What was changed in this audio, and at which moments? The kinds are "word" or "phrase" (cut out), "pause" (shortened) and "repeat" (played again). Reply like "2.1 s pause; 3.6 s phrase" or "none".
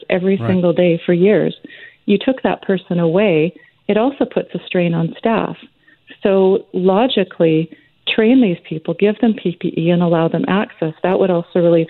none